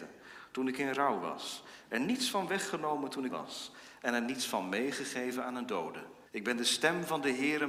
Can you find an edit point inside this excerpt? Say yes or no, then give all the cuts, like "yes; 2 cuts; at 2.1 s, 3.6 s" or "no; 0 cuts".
yes; 2 cuts; at 3.3 s, 6.3 s